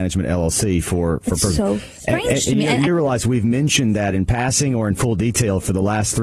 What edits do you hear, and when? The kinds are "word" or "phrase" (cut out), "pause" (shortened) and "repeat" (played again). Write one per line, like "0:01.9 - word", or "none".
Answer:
0:02.9 - phrase